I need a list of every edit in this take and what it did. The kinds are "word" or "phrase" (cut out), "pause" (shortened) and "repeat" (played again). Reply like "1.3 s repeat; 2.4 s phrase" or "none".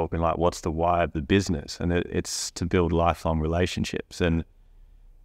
none